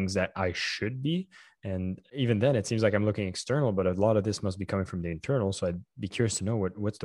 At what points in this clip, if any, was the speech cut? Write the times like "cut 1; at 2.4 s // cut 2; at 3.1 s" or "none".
none